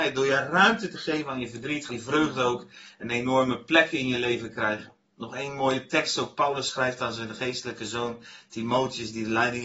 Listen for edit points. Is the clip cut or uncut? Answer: cut